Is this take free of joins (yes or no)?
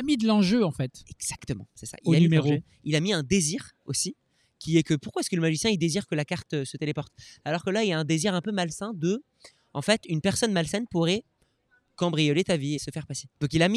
no